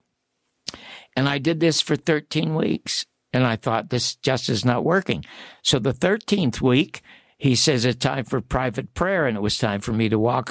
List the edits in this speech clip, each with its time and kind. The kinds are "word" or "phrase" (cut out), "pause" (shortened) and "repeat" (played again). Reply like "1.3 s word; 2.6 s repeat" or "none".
none